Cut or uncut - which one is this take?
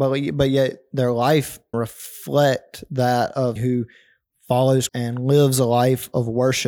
cut